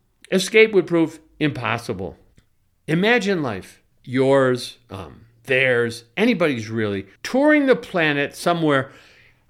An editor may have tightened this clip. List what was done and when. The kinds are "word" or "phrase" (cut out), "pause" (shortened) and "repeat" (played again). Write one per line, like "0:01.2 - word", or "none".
0:02.3 - pause
0:03.9 - pause
0:07.2 - pause